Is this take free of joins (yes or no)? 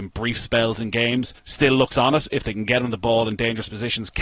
no